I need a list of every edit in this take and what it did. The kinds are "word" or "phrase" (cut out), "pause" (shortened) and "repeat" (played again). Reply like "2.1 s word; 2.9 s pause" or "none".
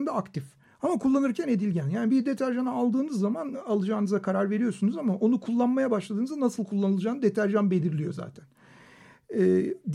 3.5 s word